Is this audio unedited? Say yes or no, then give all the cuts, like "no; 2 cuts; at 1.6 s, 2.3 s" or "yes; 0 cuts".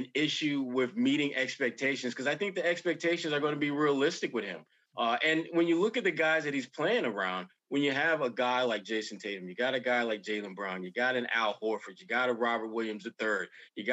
yes; 0 cuts